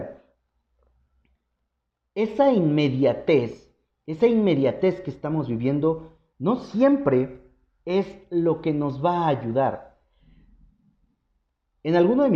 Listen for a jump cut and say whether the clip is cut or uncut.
uncut